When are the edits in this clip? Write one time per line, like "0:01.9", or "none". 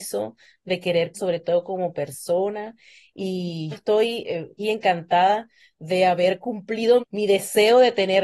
0:01.1
0:03.7
0:04.6
0:07.0